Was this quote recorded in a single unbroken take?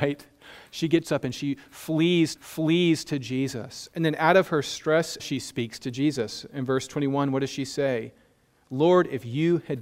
no; 2 cuts; at 2.4 s, 5.2 s

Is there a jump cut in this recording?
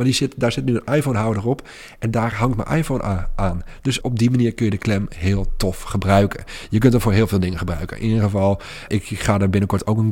yes; 2 cuts; at 4.0 s, 8.9 s

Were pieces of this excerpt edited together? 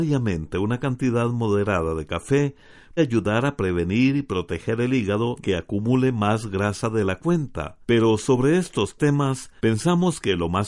yes; 4 cuts; at 3.0 s, 5.4 s, 7.8 s, 9.6 s

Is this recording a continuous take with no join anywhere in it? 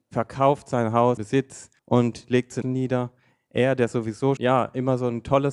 no; 4 cuts; at 1.2 s, 1.8 s, 2.6 s, 4.4 s

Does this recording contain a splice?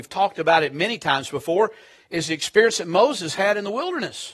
no; 0 cuts

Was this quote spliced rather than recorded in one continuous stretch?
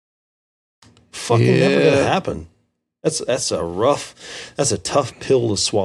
no; 0 cuts

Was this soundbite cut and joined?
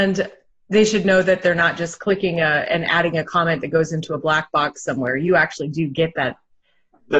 no; 0 cuts

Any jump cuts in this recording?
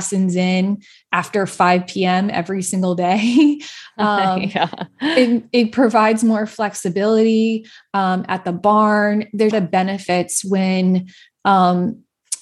yes; 1 cut; at 9.5 s

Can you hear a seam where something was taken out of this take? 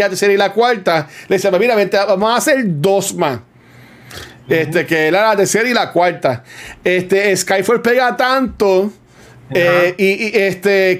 no; 0 cuts

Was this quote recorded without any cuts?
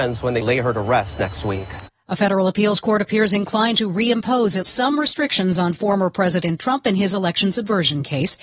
no; 1 cut; at 4.6 s

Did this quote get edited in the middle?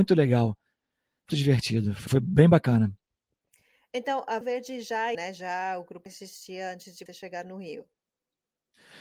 yes; 6 cuts; at 1.3 s, 2.1 s, 4.4 s, 5.1 s, 6.1 s, 7.1 s

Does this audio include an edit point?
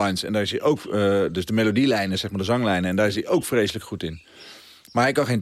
no; 0 cuts

